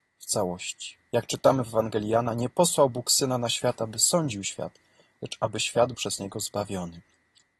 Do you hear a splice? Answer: yes; 1 cut; at 5.9 s

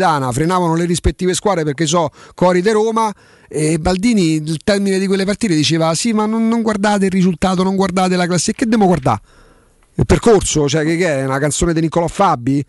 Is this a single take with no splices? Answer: yes; 0 cuts

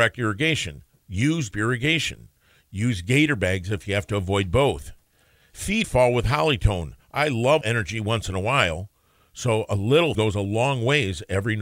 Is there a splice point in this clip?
yes; 4 cuts; at 1.5 s, 5.8 s, 7.6 s, 10.1 s

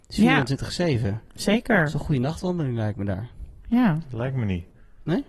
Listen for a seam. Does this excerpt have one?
no; 0 cuts

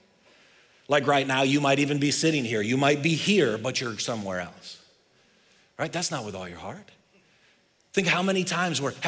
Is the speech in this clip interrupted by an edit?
no; 0 cuts

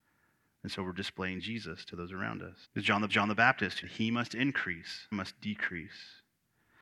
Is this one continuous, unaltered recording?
no; 4 cuts; at 2.6 s, 3.1 s, 3.8 s, 5.1 s

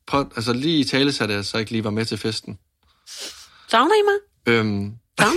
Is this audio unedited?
yes; 0 cuts

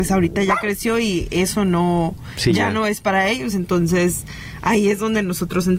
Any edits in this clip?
no; 0 cuts

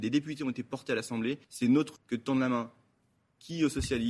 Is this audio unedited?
no; 2 cuts; at 1.4 s, 2.0 s

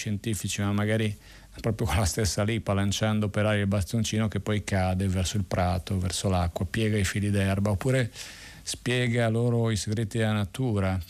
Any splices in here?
no; 0 cuts

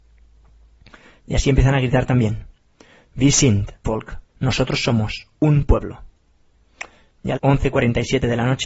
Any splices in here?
yes; 4 cuts; at 3.8 s, 4.3 s, 5.3 s, 7.4 s

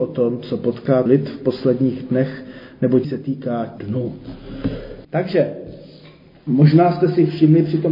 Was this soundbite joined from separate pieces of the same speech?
yes; 4 cuts; at 1.1 s, 3.0 s, 3.8 s, 5.0 s

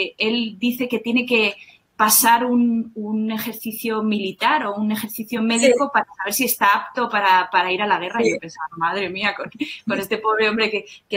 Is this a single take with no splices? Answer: yes; 0 cuts

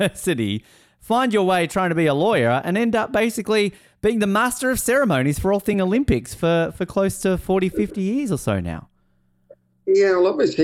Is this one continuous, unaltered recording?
yes; 0 cuts

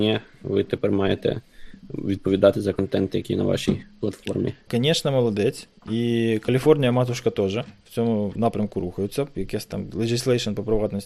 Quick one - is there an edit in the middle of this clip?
yes; 2 cuts; at 4.7 s, 8.4 s

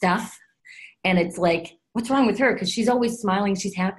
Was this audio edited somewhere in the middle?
no; 0 cuts

